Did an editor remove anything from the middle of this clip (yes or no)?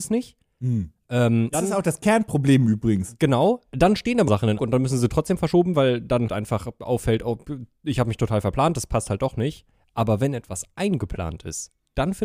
yes